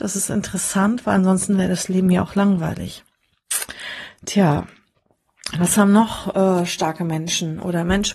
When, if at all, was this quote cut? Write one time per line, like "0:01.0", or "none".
none